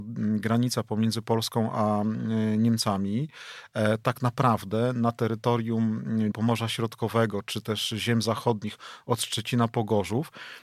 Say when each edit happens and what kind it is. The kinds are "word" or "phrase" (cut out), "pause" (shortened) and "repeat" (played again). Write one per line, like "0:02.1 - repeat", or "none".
0:06.3 - word